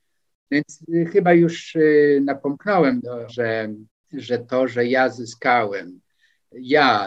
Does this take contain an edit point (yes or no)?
yes